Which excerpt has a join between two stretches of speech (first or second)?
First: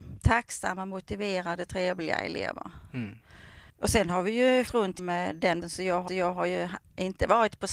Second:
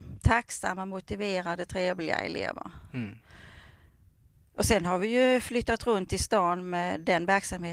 first